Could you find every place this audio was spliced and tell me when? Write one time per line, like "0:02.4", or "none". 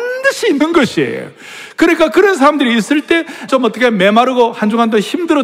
0:03.5